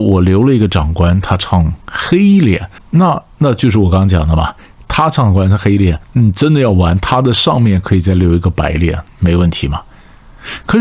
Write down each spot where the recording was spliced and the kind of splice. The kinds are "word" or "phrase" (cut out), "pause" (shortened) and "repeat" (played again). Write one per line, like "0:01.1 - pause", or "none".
0:02.8 - pause
0:06.0 - pause
0:09.1 - pause